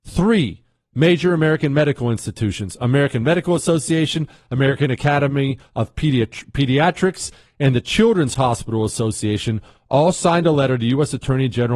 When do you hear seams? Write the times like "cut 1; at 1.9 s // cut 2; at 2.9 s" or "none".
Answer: none